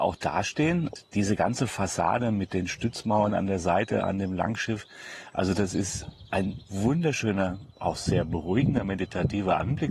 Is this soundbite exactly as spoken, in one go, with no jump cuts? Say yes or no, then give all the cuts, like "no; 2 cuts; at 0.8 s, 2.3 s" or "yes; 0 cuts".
yes; 0 cuts